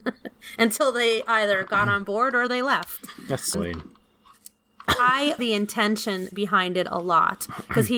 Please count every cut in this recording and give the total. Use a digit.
2